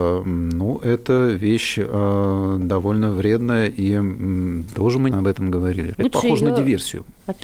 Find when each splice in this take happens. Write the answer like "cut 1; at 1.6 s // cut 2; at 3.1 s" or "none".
cut 1; at 5.1 s // cut 2; at 5.9 s